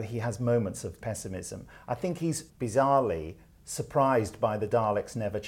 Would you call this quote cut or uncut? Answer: cut